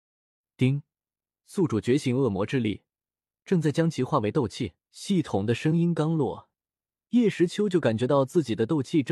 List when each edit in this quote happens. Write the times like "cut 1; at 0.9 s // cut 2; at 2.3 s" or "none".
cut 1; at 4.8 s